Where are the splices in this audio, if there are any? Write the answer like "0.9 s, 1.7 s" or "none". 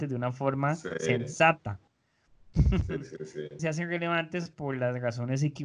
3.6 s